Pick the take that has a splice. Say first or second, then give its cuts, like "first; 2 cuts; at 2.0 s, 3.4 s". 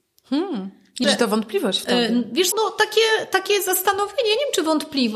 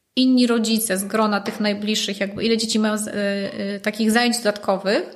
first; 2 cuts; at 1.0 s, 2.5 s